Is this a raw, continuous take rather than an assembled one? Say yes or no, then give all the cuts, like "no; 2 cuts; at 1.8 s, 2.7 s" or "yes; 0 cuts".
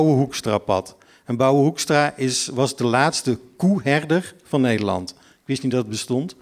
yes; 0 cuts